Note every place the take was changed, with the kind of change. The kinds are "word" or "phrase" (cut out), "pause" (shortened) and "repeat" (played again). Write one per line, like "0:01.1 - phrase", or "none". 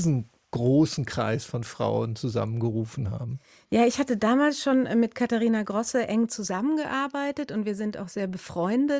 none